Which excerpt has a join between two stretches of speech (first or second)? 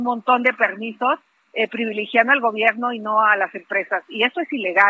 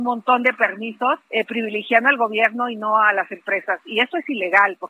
second